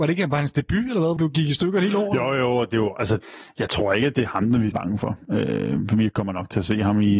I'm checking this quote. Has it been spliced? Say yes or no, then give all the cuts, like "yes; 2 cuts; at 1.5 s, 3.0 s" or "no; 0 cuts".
yes; 2 cuts; at 1.2 s, 4.7 s